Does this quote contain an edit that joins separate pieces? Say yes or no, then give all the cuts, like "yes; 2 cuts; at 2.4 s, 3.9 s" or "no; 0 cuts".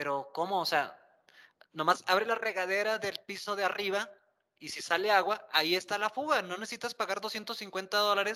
no; 0 cuts